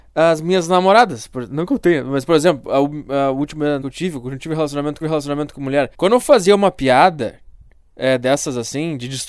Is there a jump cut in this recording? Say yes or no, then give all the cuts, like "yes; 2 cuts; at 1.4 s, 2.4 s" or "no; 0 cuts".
yes; 3 cuts; at 3.8 s, 5.0 s, 5.9 s